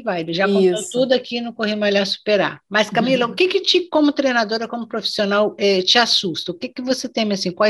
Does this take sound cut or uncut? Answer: uncut